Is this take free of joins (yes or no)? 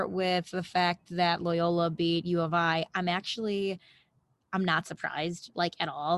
yes